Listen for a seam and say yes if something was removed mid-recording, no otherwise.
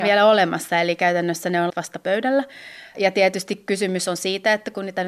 yes